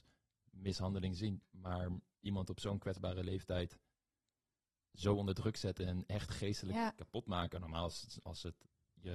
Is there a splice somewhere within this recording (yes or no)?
no